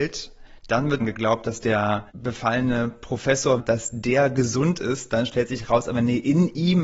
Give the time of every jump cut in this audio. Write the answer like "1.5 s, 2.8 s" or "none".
1.0 s, 2.1 s, 3.6 s